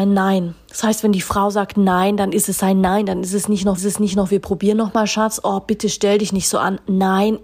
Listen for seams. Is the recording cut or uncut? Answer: cut